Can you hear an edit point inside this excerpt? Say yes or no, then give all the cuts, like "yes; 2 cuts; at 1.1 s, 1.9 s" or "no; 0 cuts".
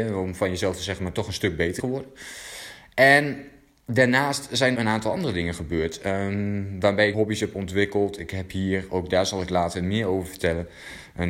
yes; 3 cuts; at 1.8 s, 4.7 s, 7.1 s